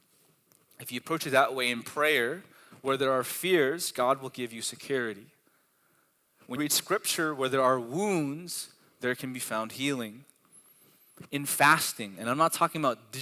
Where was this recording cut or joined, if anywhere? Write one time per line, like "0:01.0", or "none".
0:06.6